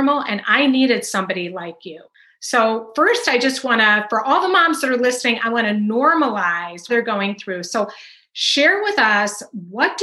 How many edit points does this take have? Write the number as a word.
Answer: one